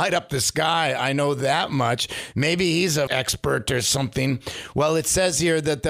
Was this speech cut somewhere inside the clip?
yes; 1 cut; at 3.1 s

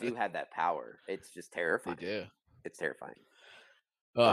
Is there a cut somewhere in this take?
no; 0 cuts

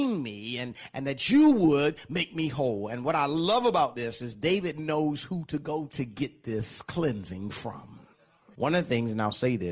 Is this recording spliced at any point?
yes; 1 cut; at 5.9 s

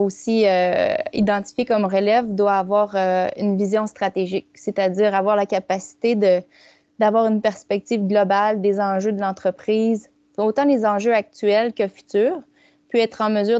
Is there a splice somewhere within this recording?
no; 0 cuts

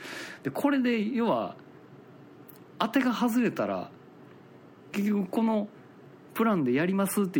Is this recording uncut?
yes; 0 cuts

